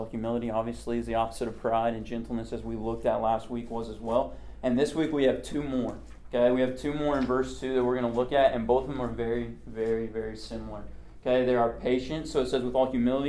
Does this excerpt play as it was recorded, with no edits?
yes; 0 cuts

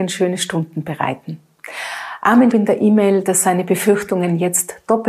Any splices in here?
yes; 1 cut; at 2.5 s

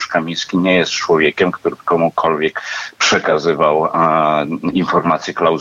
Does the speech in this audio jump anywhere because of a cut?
no; 0 cuts

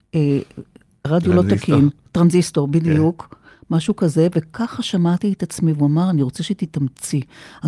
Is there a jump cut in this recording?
no; 0 cuts

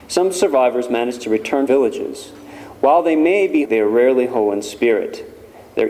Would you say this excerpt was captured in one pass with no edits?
no; 2 cuts; at 1.7 s, 3.6 s

